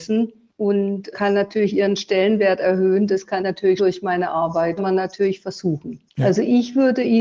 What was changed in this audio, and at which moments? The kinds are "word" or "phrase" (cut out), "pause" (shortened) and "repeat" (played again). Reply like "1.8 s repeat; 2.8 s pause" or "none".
1.1 s word; 3.4 s word; 3.8 s word; 4.8 s phrase; 6.1 s pause